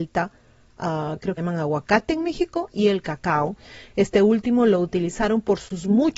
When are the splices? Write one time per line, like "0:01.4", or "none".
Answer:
0:01.4